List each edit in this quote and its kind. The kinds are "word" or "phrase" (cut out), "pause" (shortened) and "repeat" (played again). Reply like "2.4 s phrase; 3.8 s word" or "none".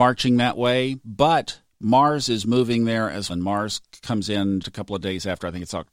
3.3 s word; 4.6 s word